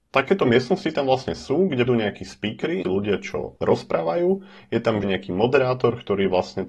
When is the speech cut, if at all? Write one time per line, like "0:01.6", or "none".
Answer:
0:01.9
0:02.8
0:05.0

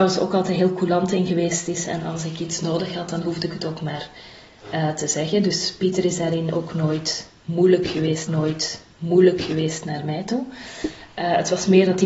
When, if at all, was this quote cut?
0:08.3

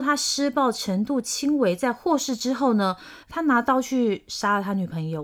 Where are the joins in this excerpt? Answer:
0:03.2

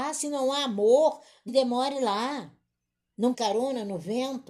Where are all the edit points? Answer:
0:01.5
0:03.3

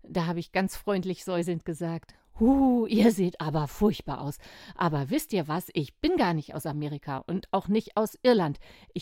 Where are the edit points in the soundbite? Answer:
none

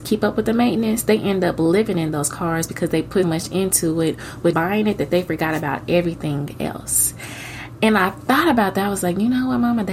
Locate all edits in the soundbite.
0:03.2
0:04.5

